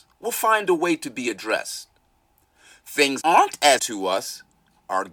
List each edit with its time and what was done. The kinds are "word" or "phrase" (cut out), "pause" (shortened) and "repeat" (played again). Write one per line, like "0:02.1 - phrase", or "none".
0:03.2 - word
0:03.8 - word